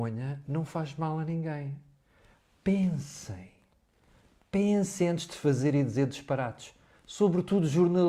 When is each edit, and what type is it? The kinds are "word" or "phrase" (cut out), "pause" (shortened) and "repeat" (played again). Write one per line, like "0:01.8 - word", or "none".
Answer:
none

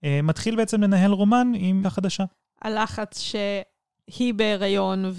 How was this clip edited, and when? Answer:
0:01.8 - word

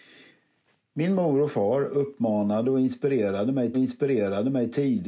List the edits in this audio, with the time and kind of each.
0:03.7 - repeat

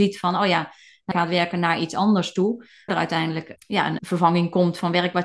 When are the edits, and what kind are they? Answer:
0:01.1 - word
0:02.9 - word
0:03.6 - word
0:04.0 - word

